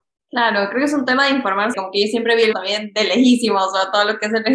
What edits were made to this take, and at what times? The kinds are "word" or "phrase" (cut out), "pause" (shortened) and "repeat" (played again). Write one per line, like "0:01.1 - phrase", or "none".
0:01.7 - word
0:02.5 - word